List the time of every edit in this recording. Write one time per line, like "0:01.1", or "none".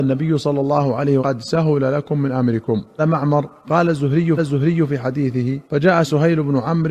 0:01.2
0:03.0
0:03.6
0:04.4
0:05.7